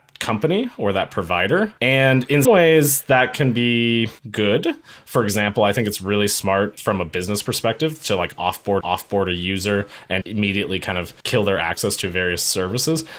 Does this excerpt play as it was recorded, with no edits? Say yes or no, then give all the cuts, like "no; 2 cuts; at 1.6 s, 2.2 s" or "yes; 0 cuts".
no; 6 cuts; at 1.8 s, 2.4 s, 4.2 s, 8.8 s, 10.2 s, 11.2 s